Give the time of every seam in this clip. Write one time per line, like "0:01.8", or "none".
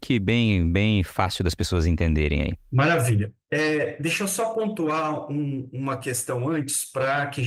0:02.6